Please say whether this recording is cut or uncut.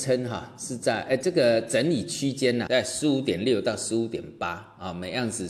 cut